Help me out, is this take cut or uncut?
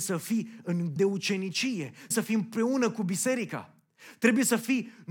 cut